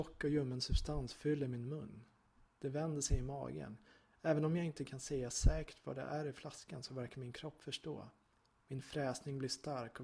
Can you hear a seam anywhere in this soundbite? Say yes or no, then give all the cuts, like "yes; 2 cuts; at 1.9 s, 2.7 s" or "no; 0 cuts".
no; 0 cuts